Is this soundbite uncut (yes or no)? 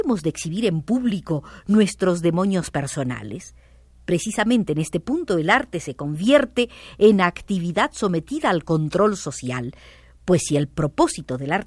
yes